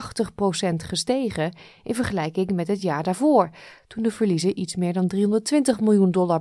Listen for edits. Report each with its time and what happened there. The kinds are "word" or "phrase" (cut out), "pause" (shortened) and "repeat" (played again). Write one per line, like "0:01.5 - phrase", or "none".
none